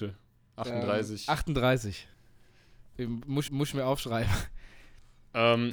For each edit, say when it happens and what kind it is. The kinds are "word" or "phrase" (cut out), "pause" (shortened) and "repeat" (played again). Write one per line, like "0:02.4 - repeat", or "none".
0:03.5 - repeat